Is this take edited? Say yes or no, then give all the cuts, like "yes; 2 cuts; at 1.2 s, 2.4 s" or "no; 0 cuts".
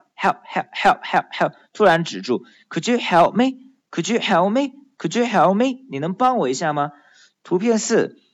no; 0 cuts